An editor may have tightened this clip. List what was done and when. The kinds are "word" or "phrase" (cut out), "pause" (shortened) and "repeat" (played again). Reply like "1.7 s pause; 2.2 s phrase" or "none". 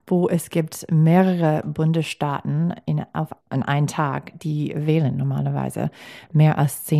3.4 s pause